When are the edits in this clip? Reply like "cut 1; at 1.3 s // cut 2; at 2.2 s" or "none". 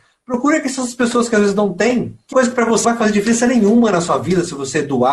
cut 1; at 2.3 s // cut 2; at 2.8 s